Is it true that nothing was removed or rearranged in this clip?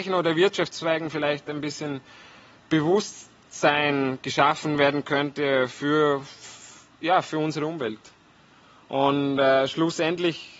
yes; 0 cuts

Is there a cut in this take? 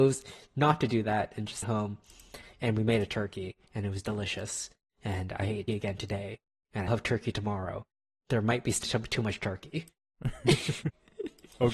yes; 4 cuts; at 1.6 s, 5.7 s, 6.9 s, 8.8 s

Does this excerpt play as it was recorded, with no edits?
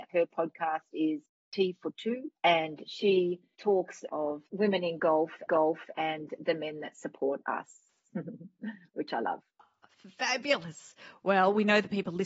no; 3 cuts; at 2.4 s, 4.5 s, 5.5 s

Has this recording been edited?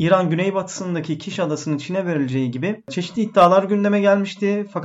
no; 0 cuts

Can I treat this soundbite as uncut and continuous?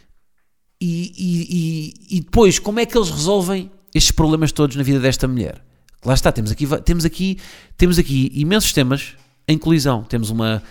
yes; 0 cuts

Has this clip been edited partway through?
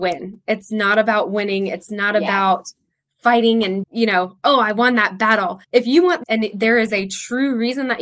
yes; 3 cuts; at 3.8 s, 5.6 s, 6.2 s

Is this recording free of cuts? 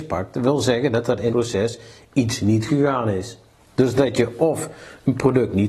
no; 2 cuts; at 1.3 s, 2.7 s

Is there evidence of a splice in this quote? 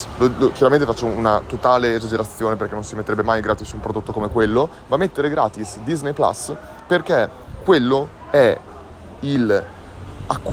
no; 0 cuts

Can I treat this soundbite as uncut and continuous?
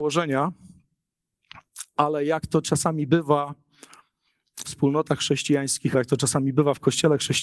no; 2 cuts; at 4.6 s, 5.9 s

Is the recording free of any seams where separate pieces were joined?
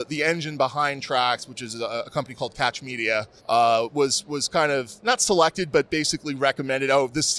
no; 2 cuts; at 3.4 s, 5.0 s

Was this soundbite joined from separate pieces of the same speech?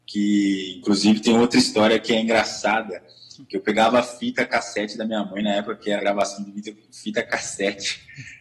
yes; 1 cut; at 6.0 s

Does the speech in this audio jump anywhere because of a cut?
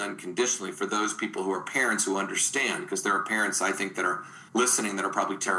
yes; 1 cut; at 4.5 s

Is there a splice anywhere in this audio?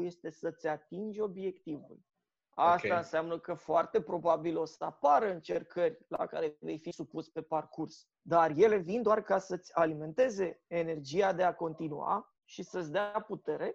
yes; 2 cuts; at 2.1 s, 8.1 s

